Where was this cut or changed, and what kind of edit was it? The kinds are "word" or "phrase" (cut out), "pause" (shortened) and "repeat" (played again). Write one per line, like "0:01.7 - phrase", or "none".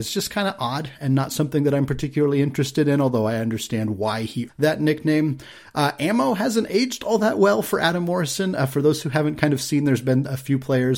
0:04.5 - word